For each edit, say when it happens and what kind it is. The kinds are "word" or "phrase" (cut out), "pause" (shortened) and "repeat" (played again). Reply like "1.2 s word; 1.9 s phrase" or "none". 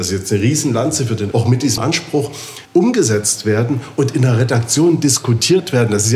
1.3 s word; 1.8 s word; 2.7 s pause

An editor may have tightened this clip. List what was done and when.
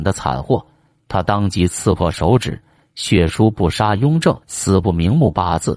4.4 s pause

